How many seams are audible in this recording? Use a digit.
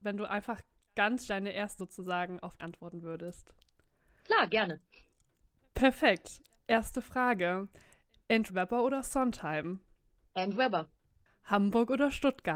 5